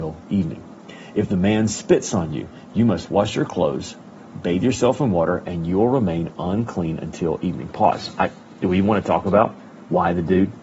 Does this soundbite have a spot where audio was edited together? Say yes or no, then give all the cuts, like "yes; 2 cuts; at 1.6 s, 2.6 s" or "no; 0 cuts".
no; 0 cuts